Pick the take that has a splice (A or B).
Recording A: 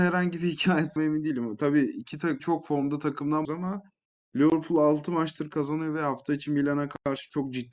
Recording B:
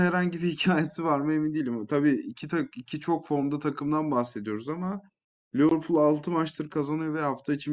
A